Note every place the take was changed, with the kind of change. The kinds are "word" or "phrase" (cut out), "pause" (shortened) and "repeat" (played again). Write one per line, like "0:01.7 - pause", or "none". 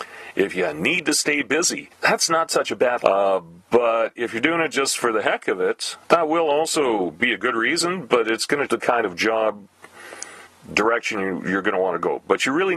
0:01.9 - pause
0:03.0 - word
0:06.0 - pause
0:08.7 - word
0:10.5 - pause

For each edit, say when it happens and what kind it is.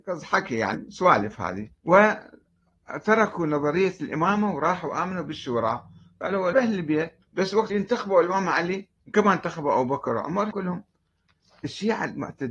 0:01.8 - pause
0:06.5 - word
0:07.2 - pause
0:07.7 - word
0:09.0 - pause
0:10.5 - phrase

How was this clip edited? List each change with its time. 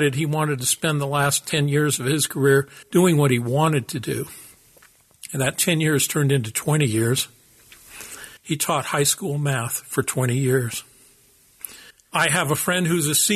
0:02.8 - pause
0:08.4 - pause
0:11.9 - pause

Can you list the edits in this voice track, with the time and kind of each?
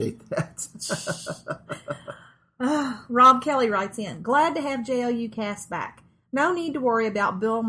none

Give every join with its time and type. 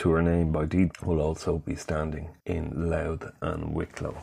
0:00.9 - word
0:02.4 - pause

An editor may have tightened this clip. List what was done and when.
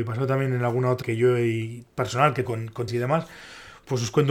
0:01.0 - word
0:02.4 - word
0:02.9 - word

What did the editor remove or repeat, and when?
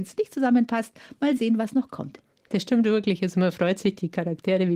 none

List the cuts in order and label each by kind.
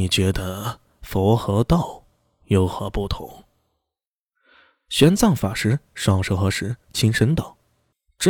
none

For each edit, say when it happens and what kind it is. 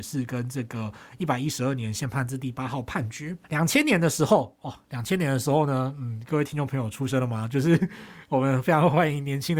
0:03.4 - pause

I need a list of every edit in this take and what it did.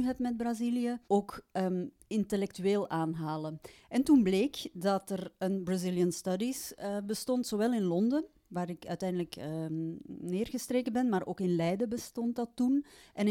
0:01.0 - pause
0:02.0 - pause

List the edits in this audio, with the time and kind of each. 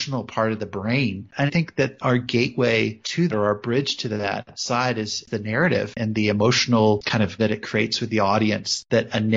0:01.5 - word
0:03.3 - word
0:07.4 - word

